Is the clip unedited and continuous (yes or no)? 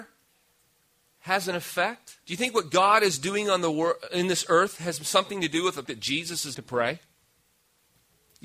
no